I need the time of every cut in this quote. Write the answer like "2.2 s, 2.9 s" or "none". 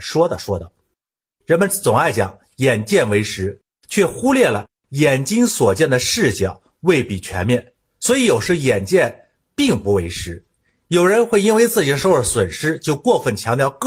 none